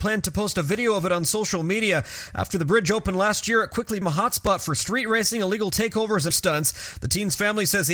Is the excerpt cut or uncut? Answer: cut